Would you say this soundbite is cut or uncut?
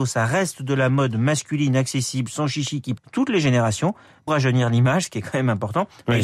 cut